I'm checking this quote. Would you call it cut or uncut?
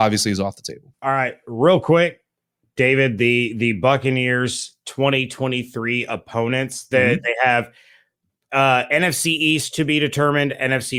uncut